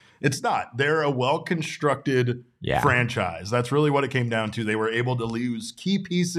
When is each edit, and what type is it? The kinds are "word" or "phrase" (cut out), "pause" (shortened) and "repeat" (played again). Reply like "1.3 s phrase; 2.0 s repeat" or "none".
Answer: none

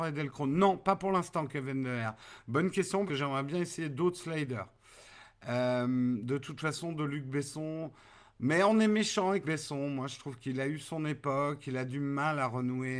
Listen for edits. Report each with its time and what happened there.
3.1 s word; 9.4 s word

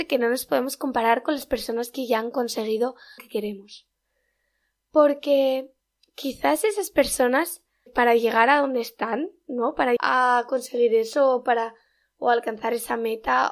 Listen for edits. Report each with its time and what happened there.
3.2 s word; 7.9 s word; 10.0 s word

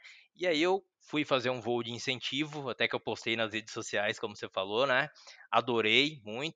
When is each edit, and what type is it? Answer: 0.9 s pause

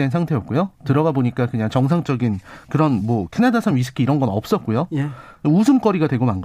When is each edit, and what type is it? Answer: none

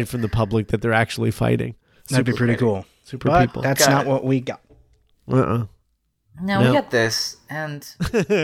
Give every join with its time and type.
none

